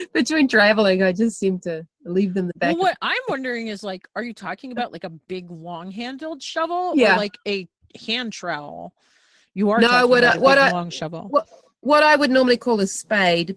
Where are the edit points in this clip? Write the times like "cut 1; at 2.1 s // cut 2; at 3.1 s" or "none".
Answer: none